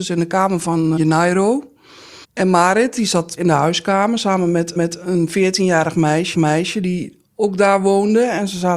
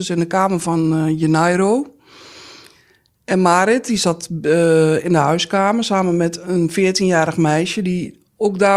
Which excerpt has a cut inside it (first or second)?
first